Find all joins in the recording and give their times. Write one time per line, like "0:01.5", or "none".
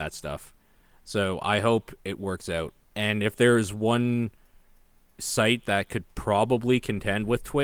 0:02.8